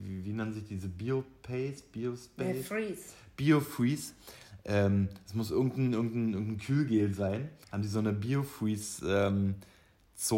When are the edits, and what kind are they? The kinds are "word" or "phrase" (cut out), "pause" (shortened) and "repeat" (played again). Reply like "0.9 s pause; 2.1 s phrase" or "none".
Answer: 7.6 s pause